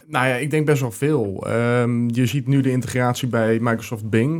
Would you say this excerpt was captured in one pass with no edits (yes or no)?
yes